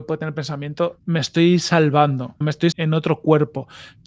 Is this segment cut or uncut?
cut